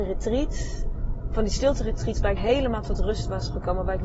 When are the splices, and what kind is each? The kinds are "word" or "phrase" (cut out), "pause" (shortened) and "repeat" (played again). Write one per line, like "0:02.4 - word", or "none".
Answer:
0:02.4 - word